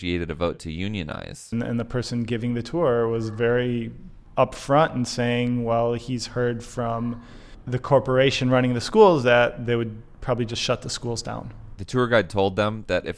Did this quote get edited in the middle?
no; 0 cuts

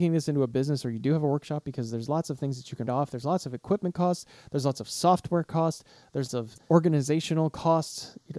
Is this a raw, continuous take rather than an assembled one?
no; 2 cuts; at 2.9 s, 6.3 s

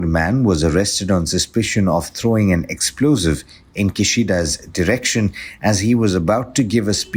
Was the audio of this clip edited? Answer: no; 0 cuts

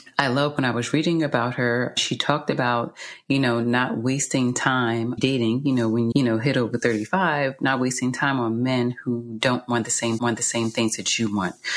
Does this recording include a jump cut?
yes; 3 cuts; at 5.2 s, 6.1 s, 10.2 s

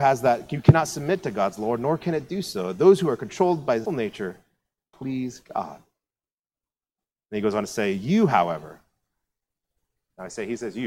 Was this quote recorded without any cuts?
no; 2 cuts; at 3.9 s, 4.9 s

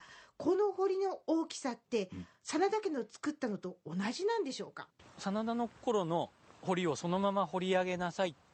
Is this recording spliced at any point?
yes; 3 cuts; at 4.9 s, 5.7 s, 6.4 s

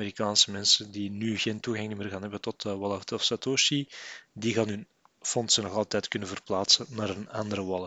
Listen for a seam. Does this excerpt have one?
no; 0 cuts

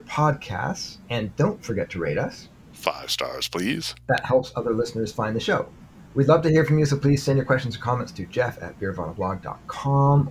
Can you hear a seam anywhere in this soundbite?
no; 0 cuts

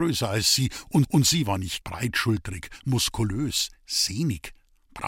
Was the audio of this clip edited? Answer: yes; 2 cuts; at 1.0 s, 1.8 s

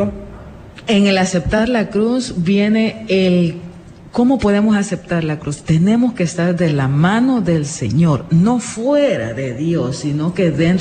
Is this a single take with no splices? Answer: yes; 0 cuts

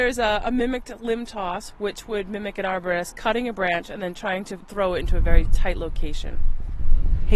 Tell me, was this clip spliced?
no; 0 cuts

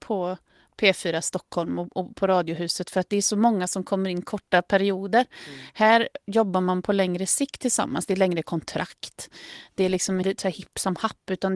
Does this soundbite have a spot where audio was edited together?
yes; 1 cut; at 10.2 s

